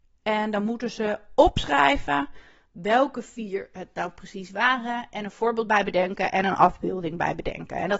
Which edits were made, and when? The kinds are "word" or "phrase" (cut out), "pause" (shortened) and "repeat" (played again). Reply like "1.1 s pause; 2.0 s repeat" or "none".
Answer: none